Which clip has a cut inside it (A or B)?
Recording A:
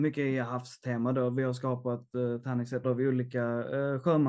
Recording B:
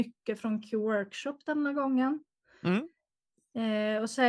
A